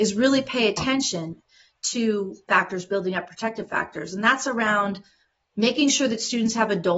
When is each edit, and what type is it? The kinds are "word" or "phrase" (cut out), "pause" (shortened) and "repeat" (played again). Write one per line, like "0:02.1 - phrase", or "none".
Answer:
0:02.5 - word